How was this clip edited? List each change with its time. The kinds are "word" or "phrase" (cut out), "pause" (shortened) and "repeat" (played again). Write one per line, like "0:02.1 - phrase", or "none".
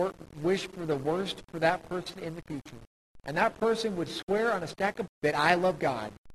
0:05.1 - word